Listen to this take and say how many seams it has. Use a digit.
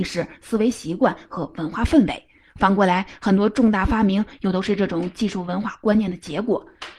0